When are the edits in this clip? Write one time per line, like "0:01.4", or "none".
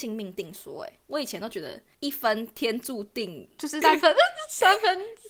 0:03.8

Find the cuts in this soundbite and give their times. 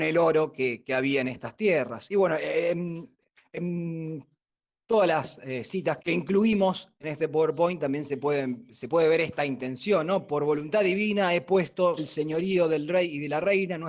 0:06.0
0:12.0

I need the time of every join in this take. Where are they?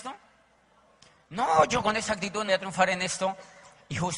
0:02.5

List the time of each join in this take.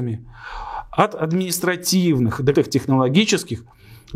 0:02.5

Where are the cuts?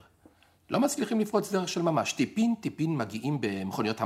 none

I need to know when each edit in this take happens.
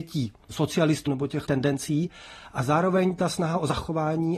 0:01.1
0:01.5

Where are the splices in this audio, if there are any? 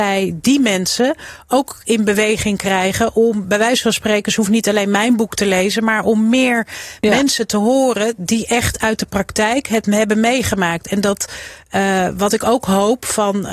none

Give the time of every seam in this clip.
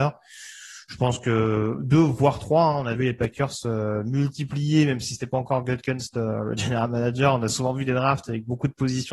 0:03.0

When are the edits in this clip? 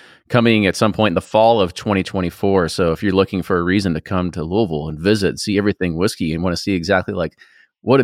none

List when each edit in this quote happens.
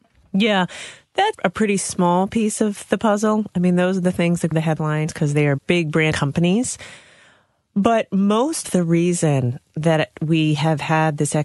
0:01.3
0:04.5
0:05.6
0:06.1
0:08.6

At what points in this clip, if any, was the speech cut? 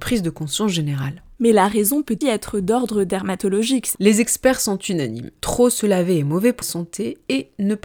0:02.2
0:03.9
0:06.6

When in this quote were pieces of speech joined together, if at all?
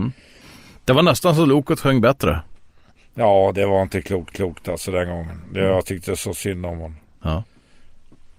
0:04.3

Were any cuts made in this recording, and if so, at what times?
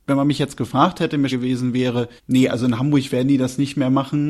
0:01.3
0:02.2

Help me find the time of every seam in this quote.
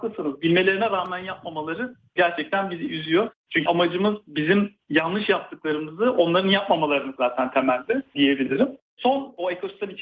0:03.7
0:07.2

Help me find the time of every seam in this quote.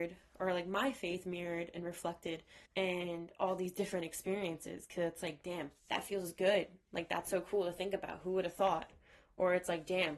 0:02.7
0:05.8

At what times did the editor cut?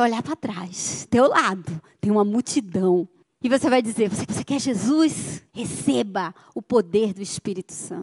0:01.1
0:03.2
0:04.3
0:05.5

